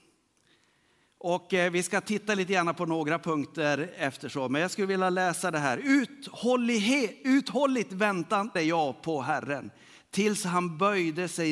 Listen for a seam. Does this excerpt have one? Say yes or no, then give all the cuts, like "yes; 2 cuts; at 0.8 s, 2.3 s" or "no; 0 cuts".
yes; 1 cut; at 8.6 s